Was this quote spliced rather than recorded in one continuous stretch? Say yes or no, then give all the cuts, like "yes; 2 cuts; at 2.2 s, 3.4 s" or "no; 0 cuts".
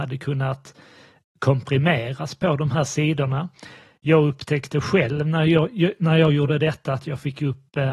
no; 0 cuts